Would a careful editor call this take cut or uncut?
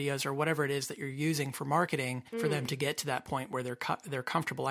cut